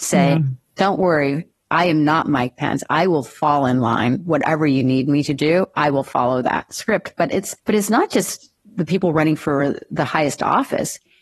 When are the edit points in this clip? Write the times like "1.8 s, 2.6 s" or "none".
7.6 s